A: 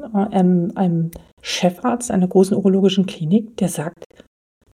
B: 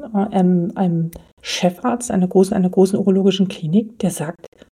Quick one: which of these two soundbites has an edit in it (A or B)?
B